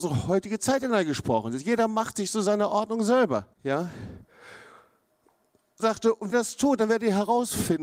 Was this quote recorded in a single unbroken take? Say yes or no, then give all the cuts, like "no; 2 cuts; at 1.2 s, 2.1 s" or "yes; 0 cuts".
no; 3 cuts; at 3.5 s, 5.8 s, 6.3 s